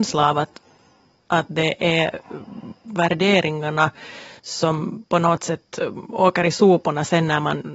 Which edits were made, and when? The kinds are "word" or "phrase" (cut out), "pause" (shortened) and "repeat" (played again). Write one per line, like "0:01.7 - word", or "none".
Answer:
0:04.4 - pause